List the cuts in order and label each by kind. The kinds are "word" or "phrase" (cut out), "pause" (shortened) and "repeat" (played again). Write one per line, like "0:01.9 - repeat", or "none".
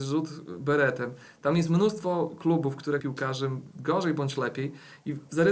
0:03.0 - phrase